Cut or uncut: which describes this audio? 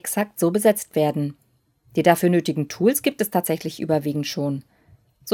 uncut